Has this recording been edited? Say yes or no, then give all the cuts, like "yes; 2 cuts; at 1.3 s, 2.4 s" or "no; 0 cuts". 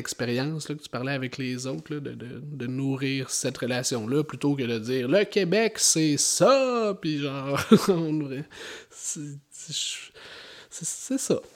no; 0 cuts